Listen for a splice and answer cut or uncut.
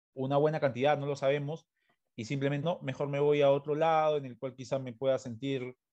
cut